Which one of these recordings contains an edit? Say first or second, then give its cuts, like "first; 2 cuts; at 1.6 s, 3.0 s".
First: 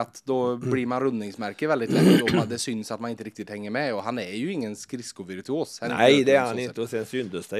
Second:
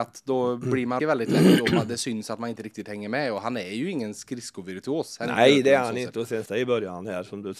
second; 2 cuts; at 1.0 s, 6.5 s